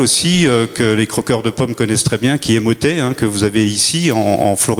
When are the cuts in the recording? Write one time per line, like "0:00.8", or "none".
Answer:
none